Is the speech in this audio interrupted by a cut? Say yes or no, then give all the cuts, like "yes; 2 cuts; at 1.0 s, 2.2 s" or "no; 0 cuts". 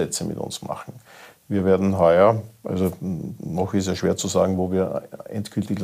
no; 0 cuts